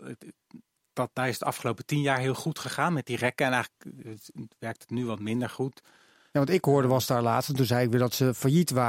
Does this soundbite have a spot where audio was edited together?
no; 0 cuts

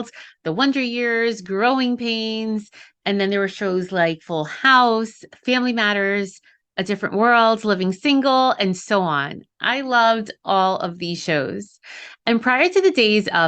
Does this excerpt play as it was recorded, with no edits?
yes; 0 cuts

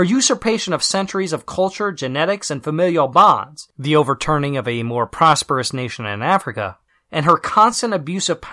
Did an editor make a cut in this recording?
no; 0 cuts

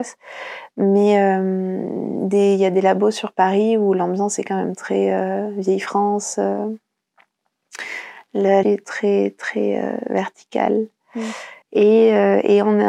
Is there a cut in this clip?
yes; 2 cuts; at 8.6 s, 11.6 s

